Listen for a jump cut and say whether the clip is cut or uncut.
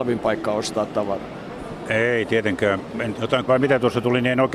cut